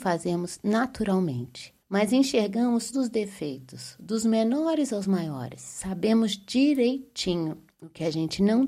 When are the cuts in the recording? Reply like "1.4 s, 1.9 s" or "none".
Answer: 1.8 s, 2.9 s